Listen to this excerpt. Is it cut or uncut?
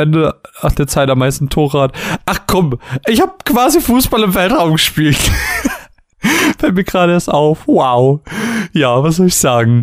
uncut